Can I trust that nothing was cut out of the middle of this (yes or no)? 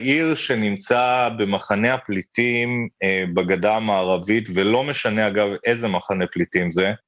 yes